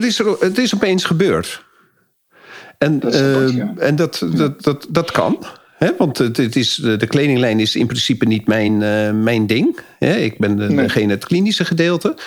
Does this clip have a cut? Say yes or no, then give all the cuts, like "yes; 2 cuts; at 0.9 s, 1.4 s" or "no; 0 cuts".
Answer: no; 0 cuts